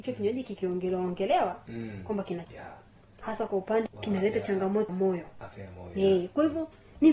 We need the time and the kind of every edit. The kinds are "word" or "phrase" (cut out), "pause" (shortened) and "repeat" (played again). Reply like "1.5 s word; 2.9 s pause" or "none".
2.4 s word; 3.9 s word; 4.9 s word